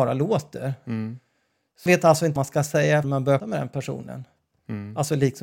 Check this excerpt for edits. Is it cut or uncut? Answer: cut